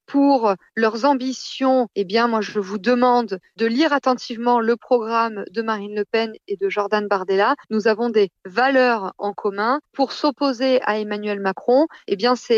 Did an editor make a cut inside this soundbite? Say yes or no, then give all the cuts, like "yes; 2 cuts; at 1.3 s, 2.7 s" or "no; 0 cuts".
yes; 1 cut; at 7.6 s